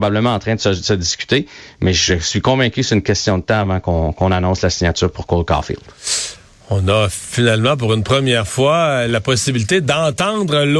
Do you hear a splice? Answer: no; 0 cuts

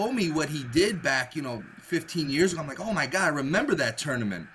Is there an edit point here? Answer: no; 0 cuts

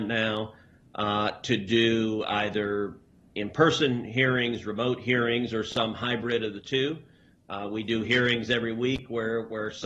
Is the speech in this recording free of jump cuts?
yes; 0 cuts

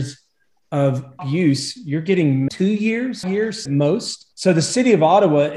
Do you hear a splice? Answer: yes; 5 cuts; at 1.2 s, 2.5 s, 3.2 s, 3.7 s, 4.3 s

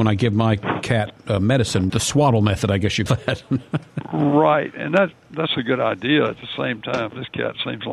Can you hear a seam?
yes; 2 cuts; at 1.9 s, 3.1 s

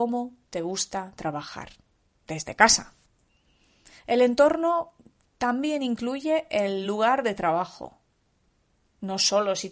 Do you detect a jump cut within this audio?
no; 0 cuts

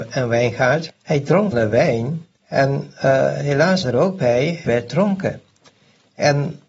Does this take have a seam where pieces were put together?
yes; 5 cuts; at 0.9 s, 1.5 s, 2.4 s, 3.8 s, 4.7 s

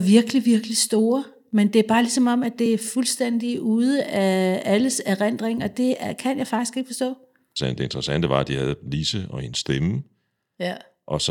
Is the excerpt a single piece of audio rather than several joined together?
yes; 0 cuts

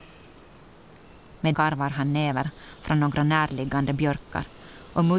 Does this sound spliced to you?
yes; 1 cut; at 1.5 s

